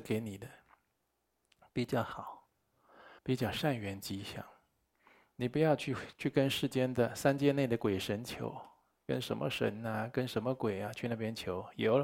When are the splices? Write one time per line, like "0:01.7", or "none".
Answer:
0:03.2